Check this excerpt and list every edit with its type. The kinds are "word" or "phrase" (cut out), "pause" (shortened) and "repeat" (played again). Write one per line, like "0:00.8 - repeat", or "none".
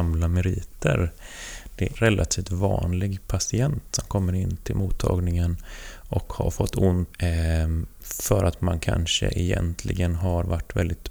0:02.0 - phrase
0:07.1 - phrase